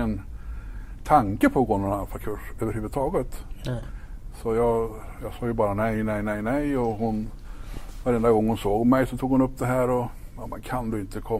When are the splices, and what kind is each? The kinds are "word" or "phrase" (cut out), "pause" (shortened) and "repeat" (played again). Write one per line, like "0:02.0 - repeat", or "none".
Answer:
none